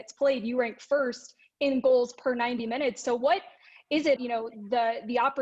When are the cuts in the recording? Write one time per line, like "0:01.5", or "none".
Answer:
0:04.2

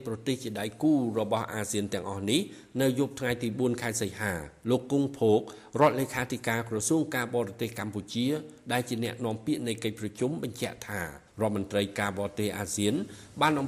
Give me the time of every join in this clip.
0:11.3

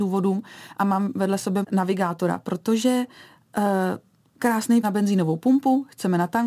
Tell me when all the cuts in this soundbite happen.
0:01.6
0:04.8

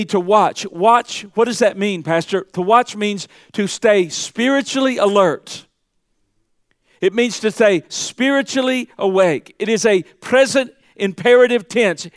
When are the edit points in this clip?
none

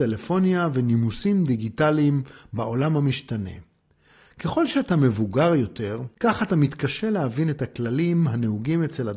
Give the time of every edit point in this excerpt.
none

